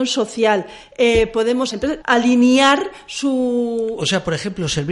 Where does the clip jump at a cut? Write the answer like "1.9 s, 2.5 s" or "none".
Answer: 1.7 s, 2.0 s